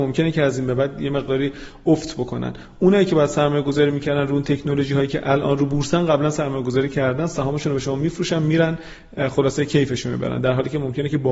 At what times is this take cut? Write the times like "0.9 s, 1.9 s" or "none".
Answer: none